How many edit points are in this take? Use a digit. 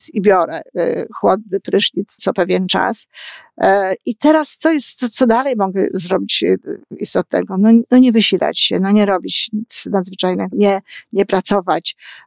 2